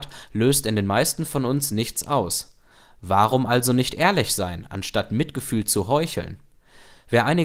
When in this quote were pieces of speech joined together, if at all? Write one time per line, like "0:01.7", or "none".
none